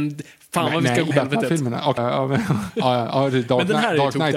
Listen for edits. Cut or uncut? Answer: cut